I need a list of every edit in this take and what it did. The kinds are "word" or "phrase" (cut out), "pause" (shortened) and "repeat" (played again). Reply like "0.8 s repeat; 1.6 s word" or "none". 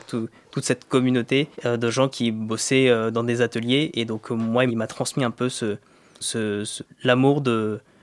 1.5 s pause; 2.1 s word; 4.7 s word; 6.2 s word; 6.8 s word